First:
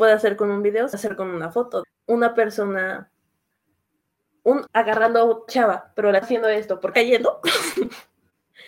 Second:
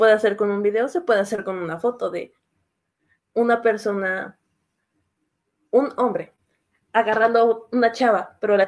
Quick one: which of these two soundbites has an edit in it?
first; 6 cuts; at 0.9 s, 1.8 s, 4.7 s, 5.5 s, 6.2 s, 6.9 s

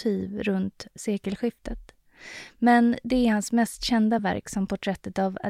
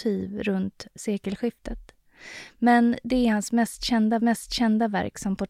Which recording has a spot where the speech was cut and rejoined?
second; 1 cut; at 4.2 s

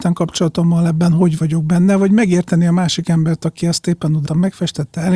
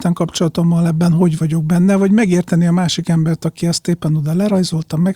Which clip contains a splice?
first; 1 cut; at 4.3 s

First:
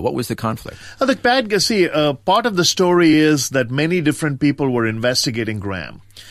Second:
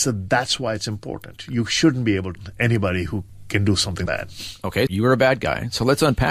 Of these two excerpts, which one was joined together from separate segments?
second; 3 cuts; at 2.3 s, 4.1 s, 4.9 s

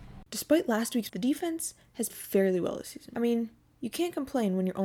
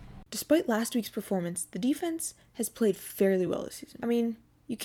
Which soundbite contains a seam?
first; 2 cuts; at 1.1 s, 2.1 s

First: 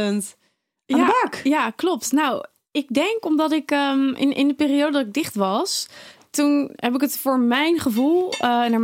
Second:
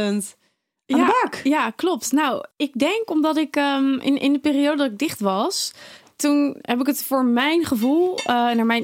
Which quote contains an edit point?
second; 1 cut; at 2.5 s

